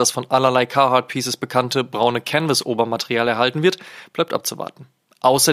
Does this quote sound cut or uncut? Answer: uncut